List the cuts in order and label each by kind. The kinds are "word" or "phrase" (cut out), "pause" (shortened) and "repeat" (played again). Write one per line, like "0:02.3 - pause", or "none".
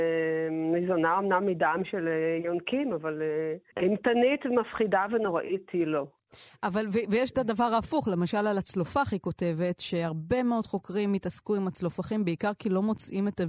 none